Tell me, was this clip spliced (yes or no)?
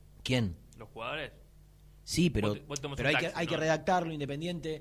no